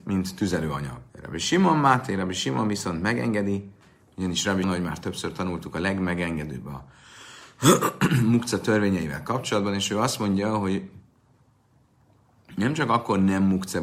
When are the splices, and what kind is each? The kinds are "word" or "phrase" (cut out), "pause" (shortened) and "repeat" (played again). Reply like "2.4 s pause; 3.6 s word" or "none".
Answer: 1.1 s pause; 4.6 s word